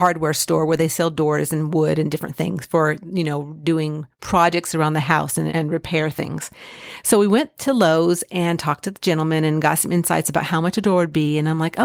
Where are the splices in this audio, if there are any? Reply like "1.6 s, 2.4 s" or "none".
5.5 s